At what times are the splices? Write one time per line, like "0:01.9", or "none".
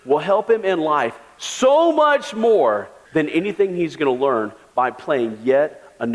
0:03.1